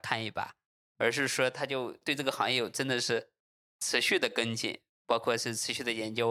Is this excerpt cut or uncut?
uncut